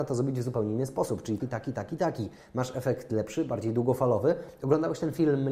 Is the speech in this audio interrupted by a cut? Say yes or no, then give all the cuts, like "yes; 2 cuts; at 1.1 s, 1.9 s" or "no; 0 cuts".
yes; 1 cut; at 1.4 s